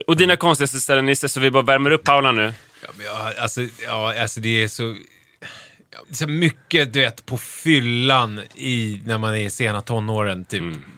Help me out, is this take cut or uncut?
cut